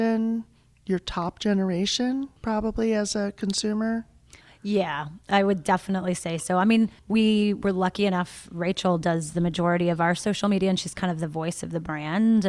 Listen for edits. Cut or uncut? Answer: cut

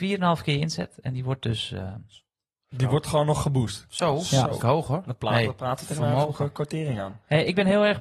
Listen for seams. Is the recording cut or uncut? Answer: cut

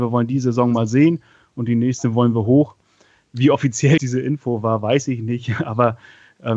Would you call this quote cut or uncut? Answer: cut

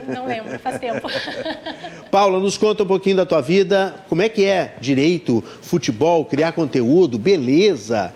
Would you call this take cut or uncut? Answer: uncut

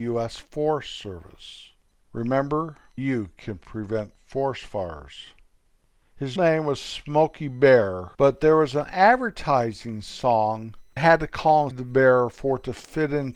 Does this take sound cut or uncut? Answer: cut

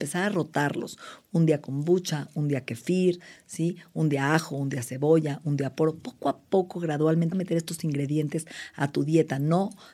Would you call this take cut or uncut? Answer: cut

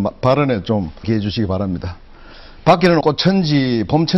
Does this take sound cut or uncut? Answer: cut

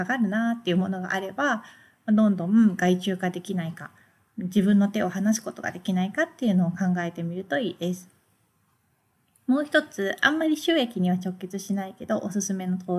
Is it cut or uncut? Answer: uncut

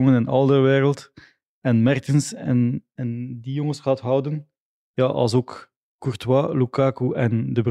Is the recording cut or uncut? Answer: uncut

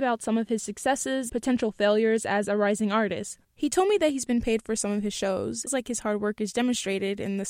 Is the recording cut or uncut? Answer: cut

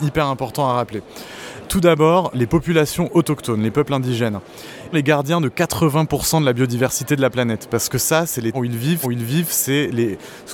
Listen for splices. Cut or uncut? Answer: cut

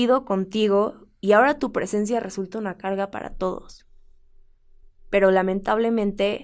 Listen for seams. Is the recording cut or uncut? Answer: uncut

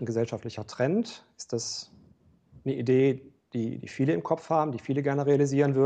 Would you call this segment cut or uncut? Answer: uncut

